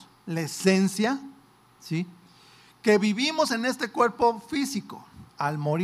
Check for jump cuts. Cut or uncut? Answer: uncut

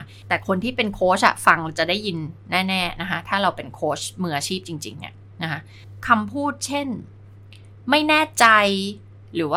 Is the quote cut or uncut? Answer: uncut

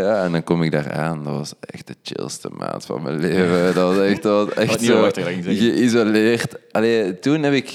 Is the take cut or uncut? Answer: uncut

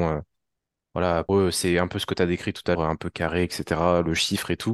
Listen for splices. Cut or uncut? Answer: cut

